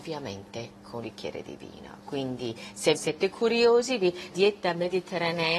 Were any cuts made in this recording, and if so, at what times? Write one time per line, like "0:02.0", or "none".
0:01.0
0:02.9
0:04.3